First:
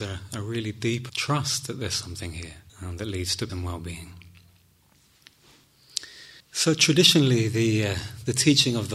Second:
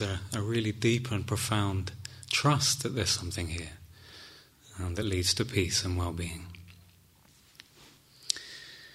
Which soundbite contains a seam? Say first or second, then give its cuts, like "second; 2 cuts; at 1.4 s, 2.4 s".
first; 4 cuts; at 1.1 s, 2.7 s, 3.5 s, 6.4 s